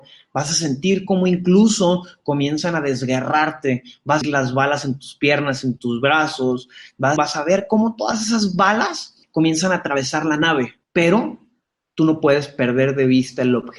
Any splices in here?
yes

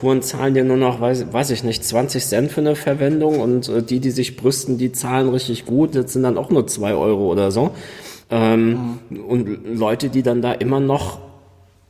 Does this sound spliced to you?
yes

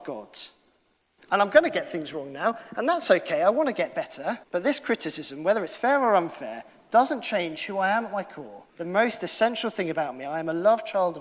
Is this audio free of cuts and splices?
no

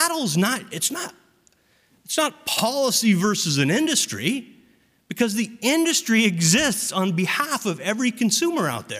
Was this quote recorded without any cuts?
yes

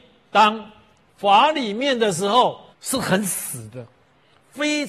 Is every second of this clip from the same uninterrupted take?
no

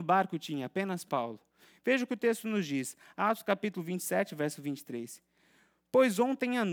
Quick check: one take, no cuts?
yes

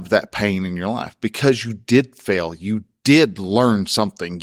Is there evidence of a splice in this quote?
no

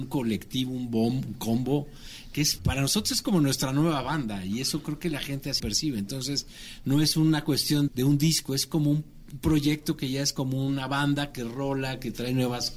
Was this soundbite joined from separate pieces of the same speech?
yes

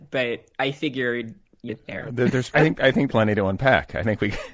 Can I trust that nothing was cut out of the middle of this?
no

